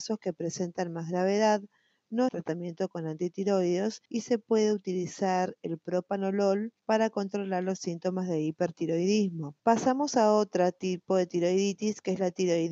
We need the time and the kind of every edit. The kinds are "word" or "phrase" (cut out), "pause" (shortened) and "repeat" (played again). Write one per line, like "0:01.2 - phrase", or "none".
0:02.3 - phrase
0:04.1 - pause
0:06.8 - pause
0:09.6 - pause

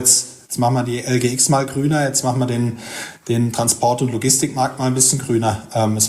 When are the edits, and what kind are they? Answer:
none

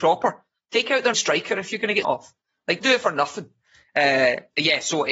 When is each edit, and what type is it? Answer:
0:01.1 - word
0:02.0 - word
0:02.8 - word

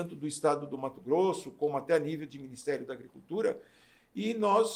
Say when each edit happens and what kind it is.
none

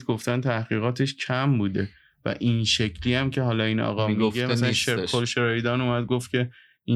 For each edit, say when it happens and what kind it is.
none

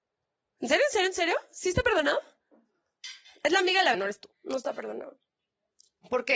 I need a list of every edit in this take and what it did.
0:03.9 - word
0:04.3 - pause

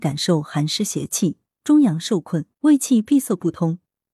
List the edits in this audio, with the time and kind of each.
0:02.5 - pause

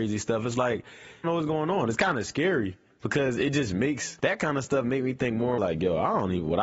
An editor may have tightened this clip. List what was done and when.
0:01.2 - phrase
0:04.2 - pause
0:05.6 - phrase

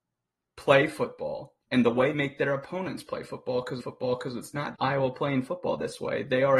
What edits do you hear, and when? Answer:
0:01.6 - pause
0:02.1 - word
0:03.8 - repeat
0:04.7 - word

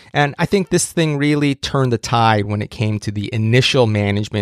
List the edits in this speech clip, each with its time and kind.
none

